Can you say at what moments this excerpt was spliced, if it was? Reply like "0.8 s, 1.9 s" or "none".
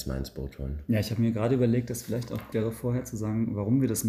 2.5 s